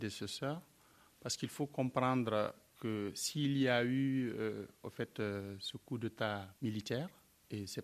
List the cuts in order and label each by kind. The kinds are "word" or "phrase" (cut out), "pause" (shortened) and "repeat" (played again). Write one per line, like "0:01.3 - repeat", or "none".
0:06.6 - pause